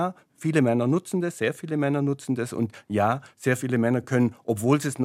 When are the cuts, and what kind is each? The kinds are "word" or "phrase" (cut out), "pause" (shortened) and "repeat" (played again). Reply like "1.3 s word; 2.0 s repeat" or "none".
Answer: none